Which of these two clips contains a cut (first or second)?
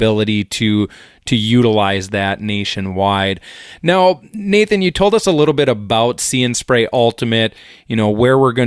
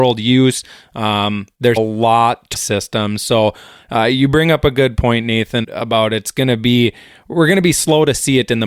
second